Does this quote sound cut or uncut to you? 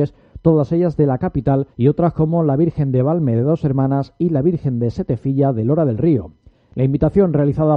cut